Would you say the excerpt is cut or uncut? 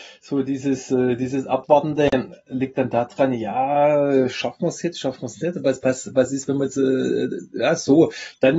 uncut